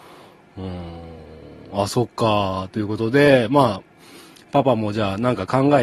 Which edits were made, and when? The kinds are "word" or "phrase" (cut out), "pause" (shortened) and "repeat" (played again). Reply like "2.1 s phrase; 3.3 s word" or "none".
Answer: none